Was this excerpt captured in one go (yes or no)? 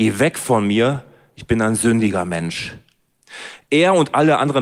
yes